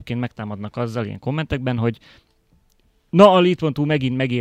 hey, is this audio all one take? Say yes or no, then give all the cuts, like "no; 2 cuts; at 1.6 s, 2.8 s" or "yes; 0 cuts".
yes; 0 cuts